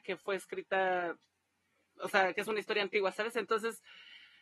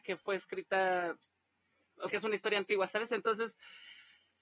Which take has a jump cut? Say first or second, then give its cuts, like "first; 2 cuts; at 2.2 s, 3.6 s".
second; 1 cut; at 2.1 s